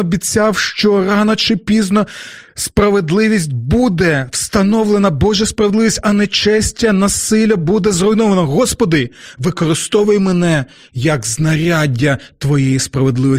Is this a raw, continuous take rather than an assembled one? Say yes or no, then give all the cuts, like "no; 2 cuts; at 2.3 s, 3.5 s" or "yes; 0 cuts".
yes; 0 cuts